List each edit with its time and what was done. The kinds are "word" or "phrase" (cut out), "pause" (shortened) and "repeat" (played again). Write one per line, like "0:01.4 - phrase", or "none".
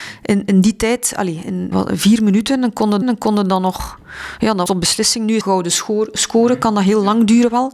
0:01.7 - word
0:03.0 - repeat
0:04.7 - word
0:05.4 - phrase

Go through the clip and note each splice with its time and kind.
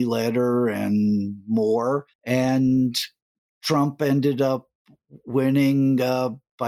0:02.1 - pause

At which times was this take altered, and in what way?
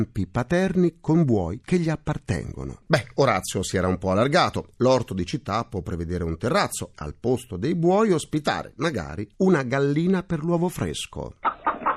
0:06.9 - word

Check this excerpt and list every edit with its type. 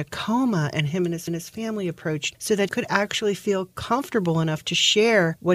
0:01.3 - repeat
0:02.3 - word
0:02.7 - word

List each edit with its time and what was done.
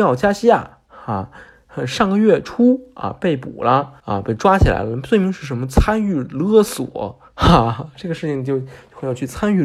0:04.0 - pause
0:07.3 - pause

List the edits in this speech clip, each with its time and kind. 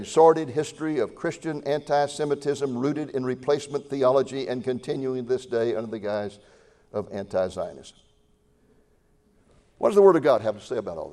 none

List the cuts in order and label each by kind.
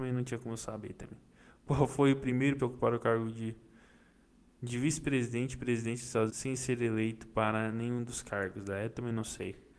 0:02.6 - word
0:06.3 - word

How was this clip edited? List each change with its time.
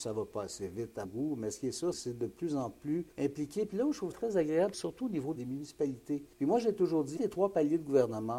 0:01.1 - word
0:01.9 - word
0:03.1 - pause
0:04.1 - word
0:04.7 - word
0:05.4 - phrase
0:06.3 - pause
0:07.2 - word

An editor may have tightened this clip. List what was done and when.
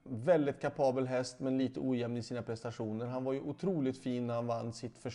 none

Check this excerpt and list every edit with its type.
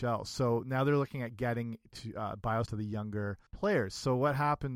0:02.7 - word
0:03.5 - pause

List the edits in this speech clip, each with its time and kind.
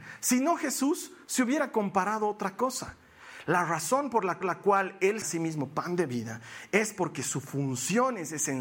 0:04.4 - repeat
0:05.2 - phrase

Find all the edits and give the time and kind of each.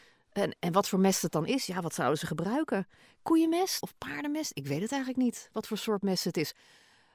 0:03.8 - word

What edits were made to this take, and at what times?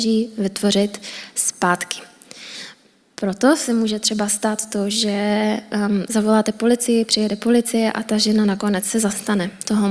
none

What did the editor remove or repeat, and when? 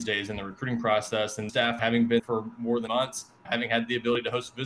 0:01.5 - word
0:01.8 - word
0:02.2 - word
0:02.9 - word
0:03.4 - word

